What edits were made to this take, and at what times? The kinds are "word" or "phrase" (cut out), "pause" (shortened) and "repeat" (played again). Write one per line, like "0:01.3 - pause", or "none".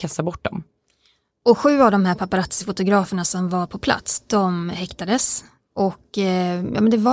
none